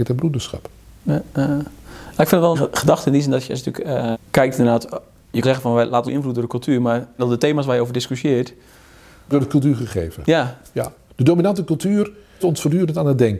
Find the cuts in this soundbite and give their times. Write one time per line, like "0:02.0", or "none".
0:02.5
0:04.1
0:05.4
0:06.1
0:07.2
0:09.3
0:12.4

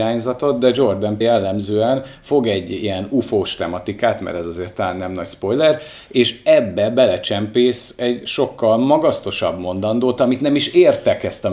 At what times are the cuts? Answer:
0:01.2

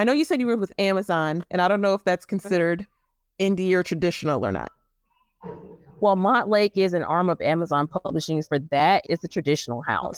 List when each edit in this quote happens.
0:08.4
0:09.0

